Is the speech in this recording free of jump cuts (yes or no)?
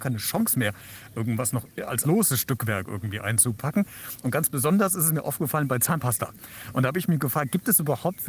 no